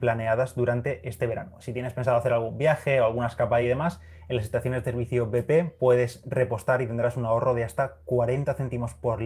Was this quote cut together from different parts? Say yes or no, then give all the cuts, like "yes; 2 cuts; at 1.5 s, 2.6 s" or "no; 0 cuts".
no; 0 cuts